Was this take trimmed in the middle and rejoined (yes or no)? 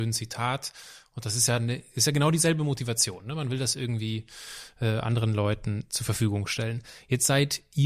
no